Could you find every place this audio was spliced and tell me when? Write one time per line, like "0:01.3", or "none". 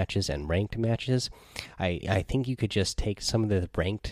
0:02.0